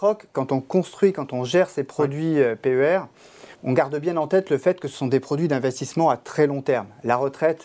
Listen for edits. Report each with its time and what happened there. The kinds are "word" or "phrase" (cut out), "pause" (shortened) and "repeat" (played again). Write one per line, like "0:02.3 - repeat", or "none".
0:03.5 - pause